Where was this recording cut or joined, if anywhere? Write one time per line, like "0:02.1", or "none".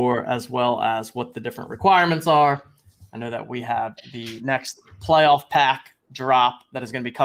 none